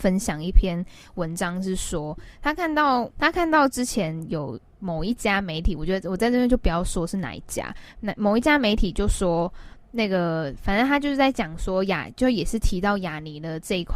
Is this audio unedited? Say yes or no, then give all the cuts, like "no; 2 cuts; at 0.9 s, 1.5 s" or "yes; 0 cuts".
no; 2 cuts; at 3.1 s, 9.7 s